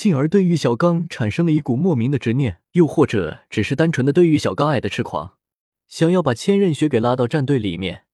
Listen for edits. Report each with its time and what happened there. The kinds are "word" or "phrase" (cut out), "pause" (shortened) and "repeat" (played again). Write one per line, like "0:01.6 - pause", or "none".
0:02.7 - pause
0:05.6 - pause